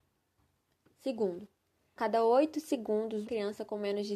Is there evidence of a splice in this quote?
yes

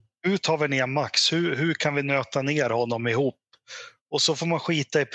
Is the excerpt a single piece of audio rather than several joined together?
yes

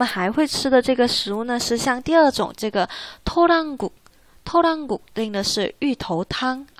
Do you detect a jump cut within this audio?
no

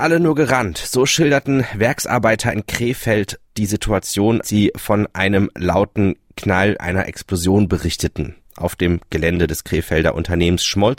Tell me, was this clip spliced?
yes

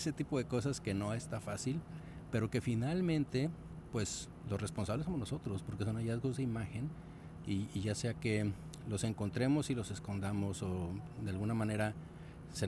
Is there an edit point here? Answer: no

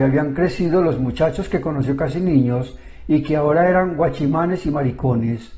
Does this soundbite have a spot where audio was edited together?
no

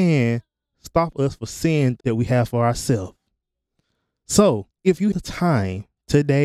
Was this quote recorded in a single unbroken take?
no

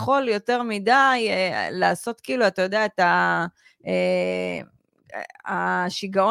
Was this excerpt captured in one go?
yes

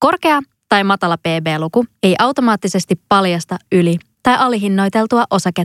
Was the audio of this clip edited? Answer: yes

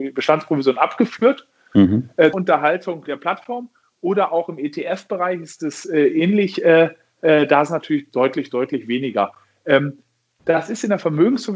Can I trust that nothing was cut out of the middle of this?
no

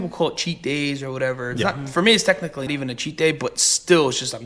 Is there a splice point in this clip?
yes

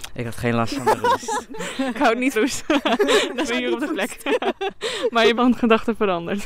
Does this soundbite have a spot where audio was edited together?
yes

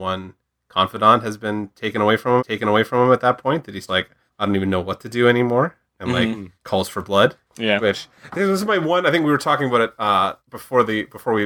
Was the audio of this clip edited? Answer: yes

